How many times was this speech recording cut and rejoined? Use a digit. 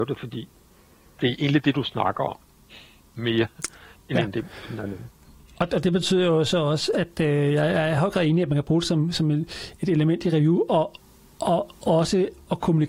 0